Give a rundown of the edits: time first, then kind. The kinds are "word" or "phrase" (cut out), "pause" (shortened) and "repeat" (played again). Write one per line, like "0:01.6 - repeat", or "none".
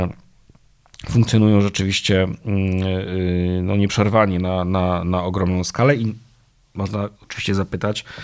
0:07.1 - pause